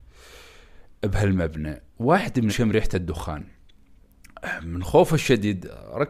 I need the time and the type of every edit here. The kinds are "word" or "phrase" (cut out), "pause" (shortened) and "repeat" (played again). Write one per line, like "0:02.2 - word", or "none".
0:01.9 - pause
0:02.5 - word